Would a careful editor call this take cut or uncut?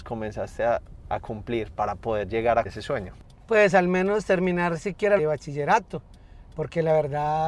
cut